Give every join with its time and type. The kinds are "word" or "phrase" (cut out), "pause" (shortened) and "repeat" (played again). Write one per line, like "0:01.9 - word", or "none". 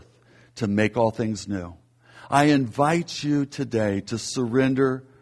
none